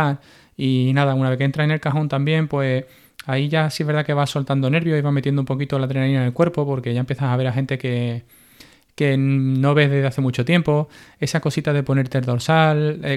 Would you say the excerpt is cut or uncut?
uncut